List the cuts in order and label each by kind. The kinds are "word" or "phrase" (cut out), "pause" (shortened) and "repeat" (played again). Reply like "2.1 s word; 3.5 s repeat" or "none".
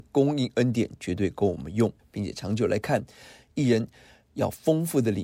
2.0 s pause